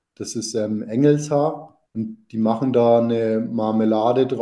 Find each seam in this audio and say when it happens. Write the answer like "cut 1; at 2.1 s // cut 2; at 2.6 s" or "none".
cut 1; at 1.9 s